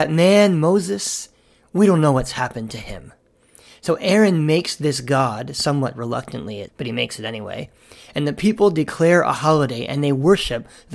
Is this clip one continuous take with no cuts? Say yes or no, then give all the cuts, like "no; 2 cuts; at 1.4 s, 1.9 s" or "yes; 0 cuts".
no; 1 cut; at 6.7 s